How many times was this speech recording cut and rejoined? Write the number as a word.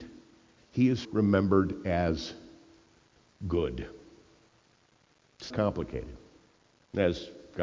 two